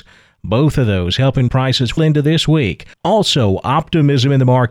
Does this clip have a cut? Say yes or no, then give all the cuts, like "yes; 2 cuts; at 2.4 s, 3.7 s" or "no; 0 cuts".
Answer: yes; 3 cuts; at 1.5 s, 2.0 s, 2.9 s